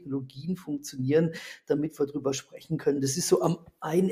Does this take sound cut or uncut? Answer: uncut